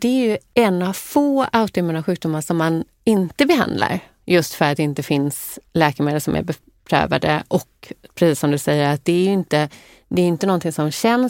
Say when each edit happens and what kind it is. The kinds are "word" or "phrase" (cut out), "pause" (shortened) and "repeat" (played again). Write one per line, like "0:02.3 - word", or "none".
none